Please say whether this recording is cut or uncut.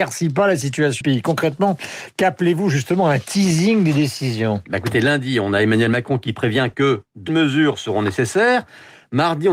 cut